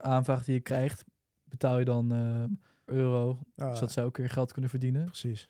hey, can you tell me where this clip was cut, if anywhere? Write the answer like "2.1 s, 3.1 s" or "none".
2.9 s